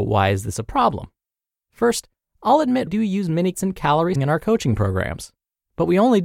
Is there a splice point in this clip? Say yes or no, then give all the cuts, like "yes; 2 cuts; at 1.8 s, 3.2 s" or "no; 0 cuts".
yes; 3 cuts; at 2.9 s, 3.5 s, 4.1 s